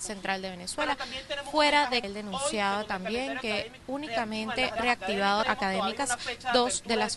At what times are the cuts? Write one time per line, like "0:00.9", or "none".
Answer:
0:02.0
0:03.8
0:04.8
0:05.4